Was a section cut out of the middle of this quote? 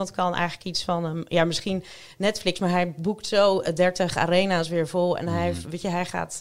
no; 0 cuts

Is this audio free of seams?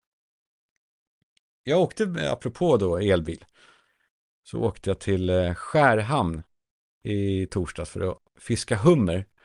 yes; 0 cuts

